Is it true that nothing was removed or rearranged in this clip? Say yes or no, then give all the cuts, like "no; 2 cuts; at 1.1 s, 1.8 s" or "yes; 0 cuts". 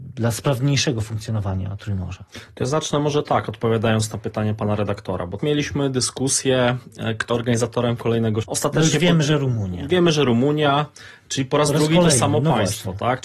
no; 3 cuts; at 5.4 s, 7.3 s, 8.4 s